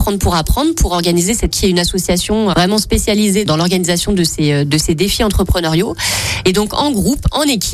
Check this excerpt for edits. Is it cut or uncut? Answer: cut